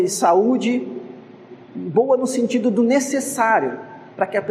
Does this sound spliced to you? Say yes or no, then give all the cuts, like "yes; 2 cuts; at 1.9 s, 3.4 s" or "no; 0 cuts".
yes; 1 cut; at 1.6 s